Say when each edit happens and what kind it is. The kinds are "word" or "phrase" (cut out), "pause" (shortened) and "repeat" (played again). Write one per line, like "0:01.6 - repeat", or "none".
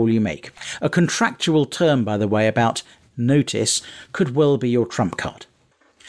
0:03.1 - word